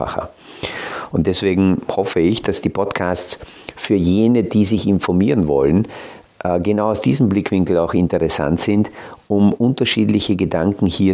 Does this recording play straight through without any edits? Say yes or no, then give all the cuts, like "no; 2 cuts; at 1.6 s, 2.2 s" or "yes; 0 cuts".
yes; 0 cuts